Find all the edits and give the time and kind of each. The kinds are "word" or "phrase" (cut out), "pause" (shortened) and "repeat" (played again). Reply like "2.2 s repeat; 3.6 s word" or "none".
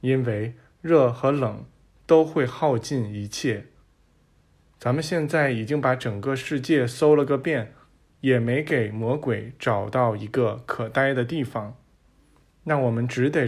none